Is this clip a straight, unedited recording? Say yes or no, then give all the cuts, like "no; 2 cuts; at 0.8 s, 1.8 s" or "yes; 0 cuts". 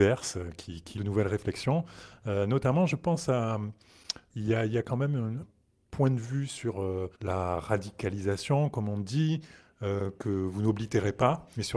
no; 4 cuts; at 1.0 s, 4.3 s, 5.4 s, 7.1 s